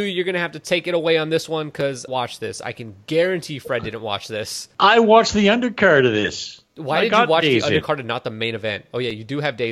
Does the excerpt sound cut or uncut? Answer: cut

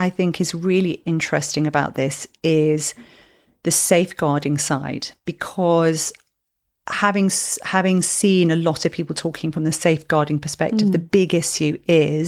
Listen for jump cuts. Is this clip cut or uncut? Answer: uncut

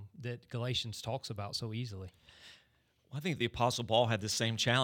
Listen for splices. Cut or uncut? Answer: uncut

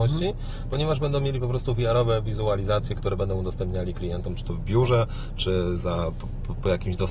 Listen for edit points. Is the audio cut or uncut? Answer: uncut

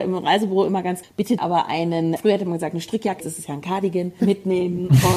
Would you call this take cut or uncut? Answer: cut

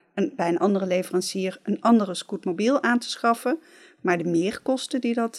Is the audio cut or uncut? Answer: uncut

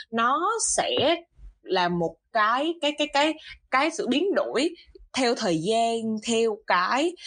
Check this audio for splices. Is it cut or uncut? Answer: uncut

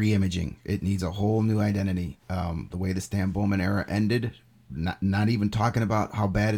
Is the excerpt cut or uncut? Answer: cut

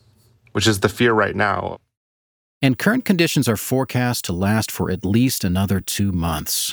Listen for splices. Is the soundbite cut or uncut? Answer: uncut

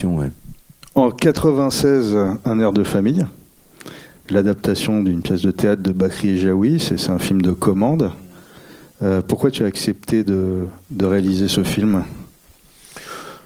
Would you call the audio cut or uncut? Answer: uncut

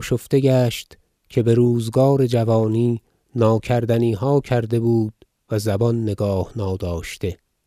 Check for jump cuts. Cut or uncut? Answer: uncut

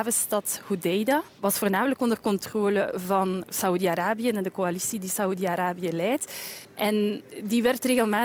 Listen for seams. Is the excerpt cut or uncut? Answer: uncut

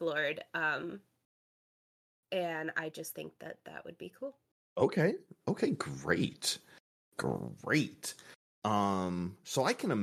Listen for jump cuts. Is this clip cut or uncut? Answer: uncut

